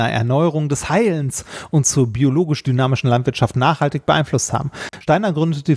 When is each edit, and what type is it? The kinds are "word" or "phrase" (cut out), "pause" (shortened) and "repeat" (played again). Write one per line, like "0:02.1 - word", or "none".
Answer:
none